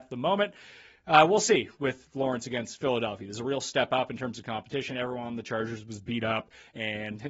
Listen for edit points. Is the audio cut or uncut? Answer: uncut